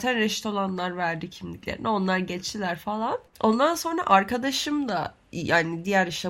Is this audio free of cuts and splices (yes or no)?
yes